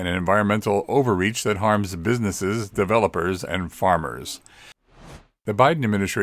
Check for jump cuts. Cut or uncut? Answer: uncut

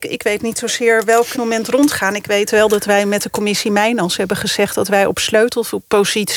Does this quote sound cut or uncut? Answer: cut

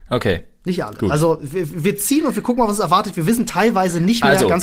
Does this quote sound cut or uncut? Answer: uncut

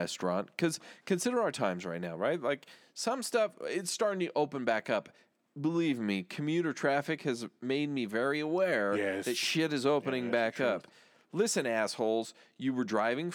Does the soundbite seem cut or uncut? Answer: uncut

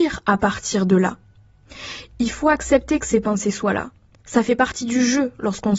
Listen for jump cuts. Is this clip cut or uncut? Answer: uncut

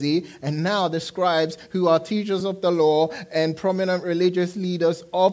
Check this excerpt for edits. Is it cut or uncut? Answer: uncut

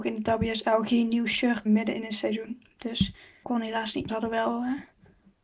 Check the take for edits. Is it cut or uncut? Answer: cut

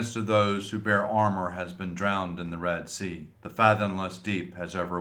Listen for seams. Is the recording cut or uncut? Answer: cut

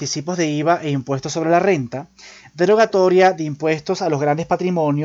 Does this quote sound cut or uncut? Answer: uncut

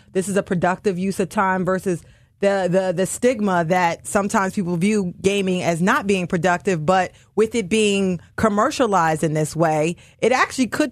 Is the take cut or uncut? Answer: uncut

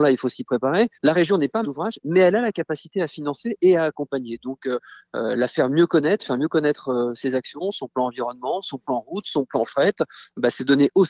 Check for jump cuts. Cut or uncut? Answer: cut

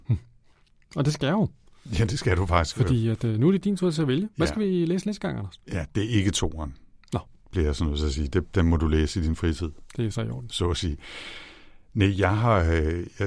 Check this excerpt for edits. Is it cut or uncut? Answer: uncut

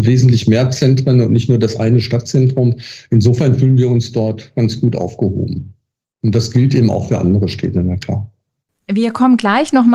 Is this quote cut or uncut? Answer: uncut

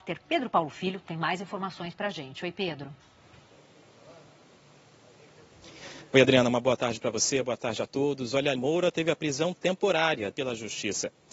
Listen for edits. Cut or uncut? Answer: cut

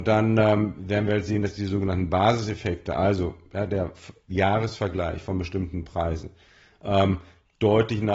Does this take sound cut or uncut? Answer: uncut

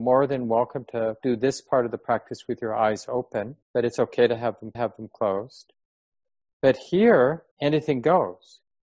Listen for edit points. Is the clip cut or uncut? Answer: cut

